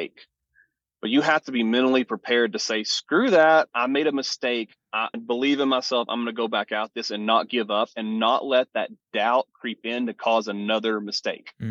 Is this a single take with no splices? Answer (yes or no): no